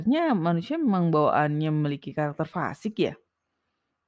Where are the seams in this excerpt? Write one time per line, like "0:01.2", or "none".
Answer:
none